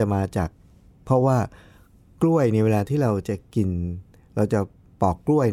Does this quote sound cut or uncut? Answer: uncut